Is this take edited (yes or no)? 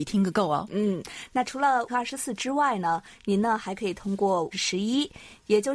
yes